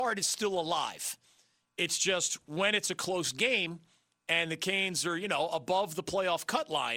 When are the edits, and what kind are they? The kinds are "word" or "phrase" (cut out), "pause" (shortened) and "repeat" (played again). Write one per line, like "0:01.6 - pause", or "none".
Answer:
none